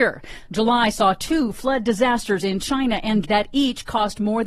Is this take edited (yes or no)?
yes